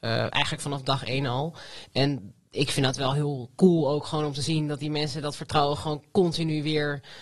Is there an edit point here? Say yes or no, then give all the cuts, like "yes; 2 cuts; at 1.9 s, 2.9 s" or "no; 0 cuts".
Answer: no; 0 cuts